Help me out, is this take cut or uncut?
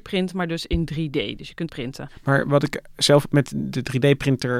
cut